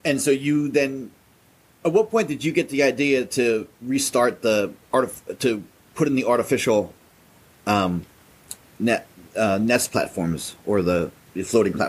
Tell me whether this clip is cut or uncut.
uncut